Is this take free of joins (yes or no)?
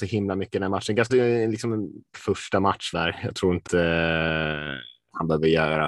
no